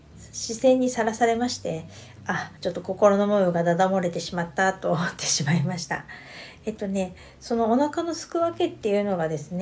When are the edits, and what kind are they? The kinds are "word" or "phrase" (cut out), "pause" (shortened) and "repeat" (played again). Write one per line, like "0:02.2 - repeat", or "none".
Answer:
0:02.6 - pause

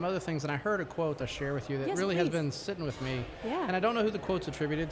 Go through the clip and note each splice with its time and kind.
0:01.2 - phrase

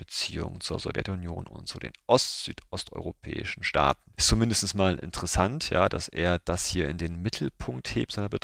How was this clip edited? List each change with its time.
none

